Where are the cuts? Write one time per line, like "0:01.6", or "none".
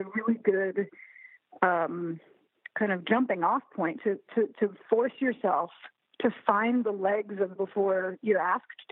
0:06.0
0:07.6

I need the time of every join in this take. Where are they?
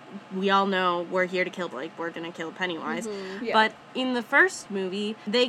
0:01.7
0:02.1

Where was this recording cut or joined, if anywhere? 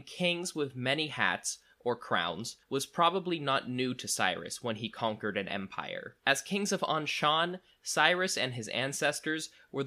0:02.6
0:06.2

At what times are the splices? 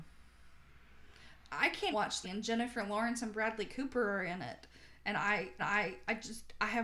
0:01.9
0:02.2
0:05.6

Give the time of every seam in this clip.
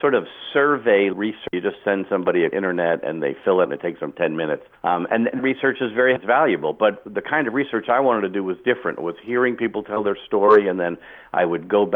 0:01.1
0:01.5
0:02.5
0:03.6
0:04.7
0:05.4
0:06.2

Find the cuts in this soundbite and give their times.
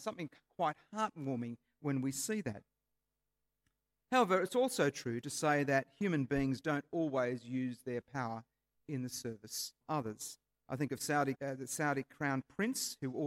0:09.8
0:11.4

